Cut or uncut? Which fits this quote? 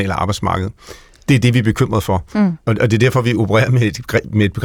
uncut